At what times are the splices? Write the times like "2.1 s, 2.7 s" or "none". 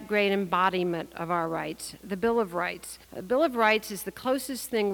3.0 s

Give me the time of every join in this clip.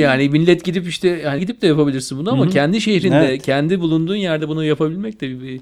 1.4 s

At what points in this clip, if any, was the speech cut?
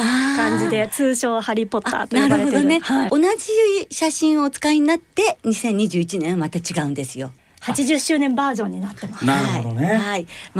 3.1 s, 7.4 s

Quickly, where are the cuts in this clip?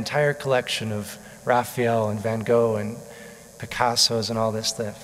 none

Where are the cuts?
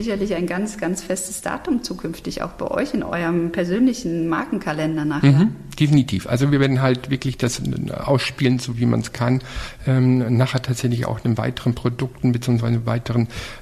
none

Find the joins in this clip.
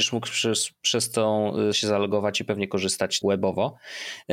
1.7 s, 3.2 s

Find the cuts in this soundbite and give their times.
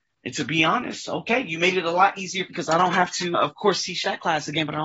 2.5 s, 3.3 s

